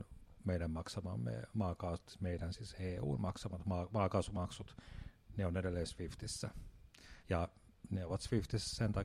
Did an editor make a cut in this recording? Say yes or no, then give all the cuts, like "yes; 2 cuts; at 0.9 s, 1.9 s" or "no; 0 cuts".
yes; 1 cut; at 7.2 s